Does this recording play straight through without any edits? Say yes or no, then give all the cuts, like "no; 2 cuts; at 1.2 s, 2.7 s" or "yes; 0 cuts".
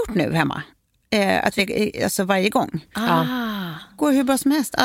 no; 1 cut; at 1.6 s